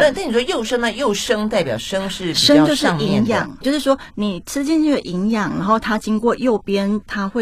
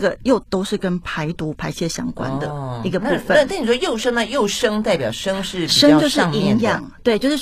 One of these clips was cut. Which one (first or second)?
first